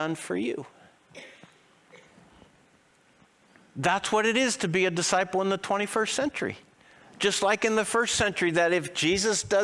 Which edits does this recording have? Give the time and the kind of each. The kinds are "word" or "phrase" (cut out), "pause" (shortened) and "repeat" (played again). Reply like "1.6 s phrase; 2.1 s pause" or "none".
none